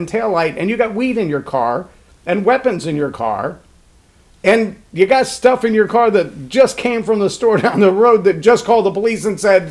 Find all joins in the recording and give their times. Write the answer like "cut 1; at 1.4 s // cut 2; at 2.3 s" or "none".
none